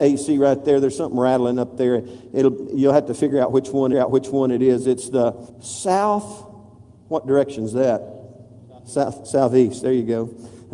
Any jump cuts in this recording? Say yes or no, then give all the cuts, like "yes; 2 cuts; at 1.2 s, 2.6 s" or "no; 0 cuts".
yes; 2 cuts; at 3.9 s, 5.5 s